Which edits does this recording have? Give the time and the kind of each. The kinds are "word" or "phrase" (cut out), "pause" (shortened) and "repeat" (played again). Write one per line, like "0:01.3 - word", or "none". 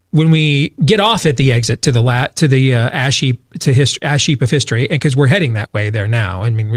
none